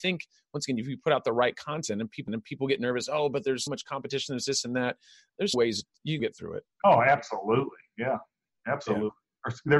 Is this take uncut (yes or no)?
no